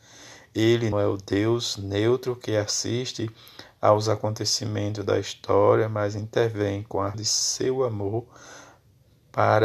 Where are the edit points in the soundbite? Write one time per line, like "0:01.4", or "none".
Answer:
0:00.9
0:07.1